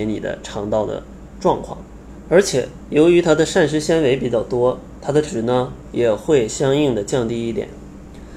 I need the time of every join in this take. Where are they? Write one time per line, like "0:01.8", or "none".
0:05.2